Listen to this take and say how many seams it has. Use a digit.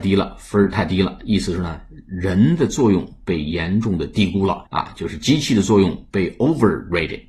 1